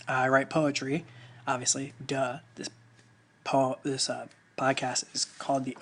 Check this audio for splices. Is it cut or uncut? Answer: uncut